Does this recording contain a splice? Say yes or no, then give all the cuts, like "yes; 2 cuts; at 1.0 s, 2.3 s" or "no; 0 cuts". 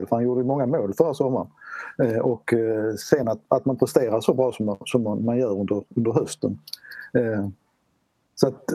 no; 0 cuts